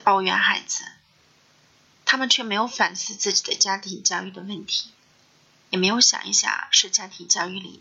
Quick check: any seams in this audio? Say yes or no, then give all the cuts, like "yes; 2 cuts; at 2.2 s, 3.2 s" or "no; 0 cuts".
no; 0 cuts